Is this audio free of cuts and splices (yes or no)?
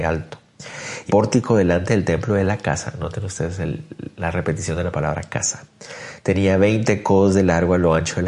no